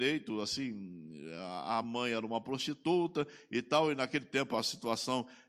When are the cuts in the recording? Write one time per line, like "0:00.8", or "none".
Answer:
none